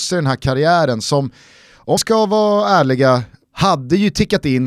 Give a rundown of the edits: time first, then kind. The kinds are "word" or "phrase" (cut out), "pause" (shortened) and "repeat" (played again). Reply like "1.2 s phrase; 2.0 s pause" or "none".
2.0 s word

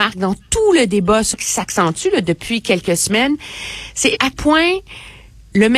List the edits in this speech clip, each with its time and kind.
1.3 s word; 4.3 s word

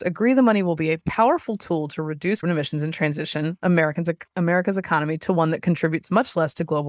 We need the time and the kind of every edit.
2.4 s word

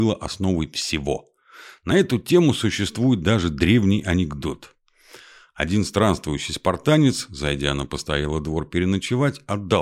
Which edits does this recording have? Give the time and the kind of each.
none

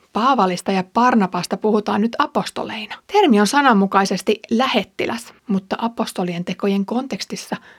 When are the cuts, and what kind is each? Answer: 3.0 s pause; 5.4 s pause

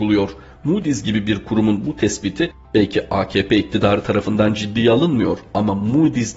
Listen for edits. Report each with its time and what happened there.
none

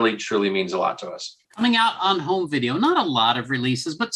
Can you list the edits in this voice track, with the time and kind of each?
1.4 s pause

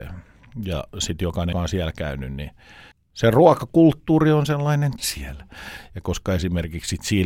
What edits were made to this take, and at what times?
1.5 s word; 2.9 s pause; 5.0 s word

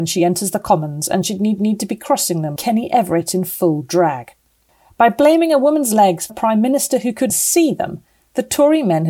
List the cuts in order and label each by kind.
1.6 s repeat; 2.6 s word; 4.7 s pause; 6.3 s phrase; 7.3 s word

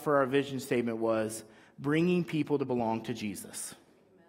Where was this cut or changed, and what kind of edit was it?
none

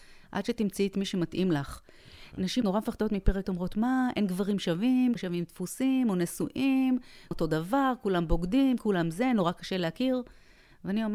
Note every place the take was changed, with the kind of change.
2.6 s word; 3.4 s word; 5.2 s word; 7.3 s word

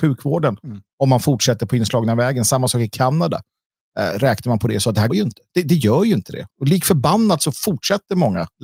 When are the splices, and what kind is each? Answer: 5.1 s word

